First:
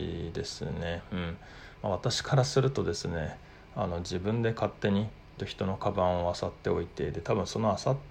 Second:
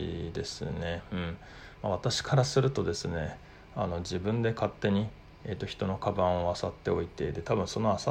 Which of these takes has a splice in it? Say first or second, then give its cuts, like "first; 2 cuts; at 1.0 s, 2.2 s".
first; 1 cut; at 5.4 s